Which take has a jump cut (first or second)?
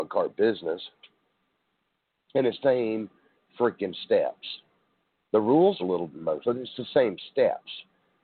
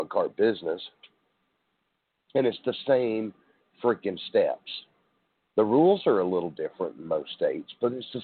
first